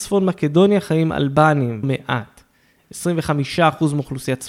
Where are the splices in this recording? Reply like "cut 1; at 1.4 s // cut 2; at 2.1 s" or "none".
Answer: cut 1; at 1.8 s